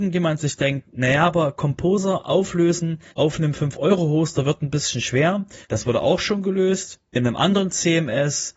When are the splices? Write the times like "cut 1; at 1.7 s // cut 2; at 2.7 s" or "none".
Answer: cut 1; at 3.1 s // cut 2; at 5.6 s // cut 3; at 7.1 s